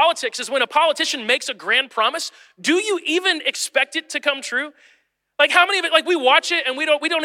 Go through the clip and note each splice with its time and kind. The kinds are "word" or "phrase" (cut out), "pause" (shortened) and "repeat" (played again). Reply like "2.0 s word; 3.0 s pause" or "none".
none